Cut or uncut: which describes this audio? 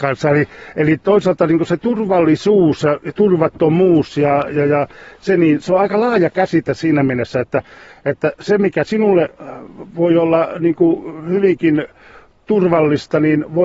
uncut